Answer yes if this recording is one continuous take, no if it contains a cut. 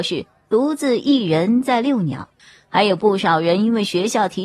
no